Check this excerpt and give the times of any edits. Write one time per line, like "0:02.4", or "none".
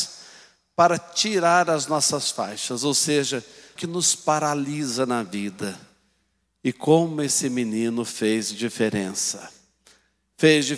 0:03.8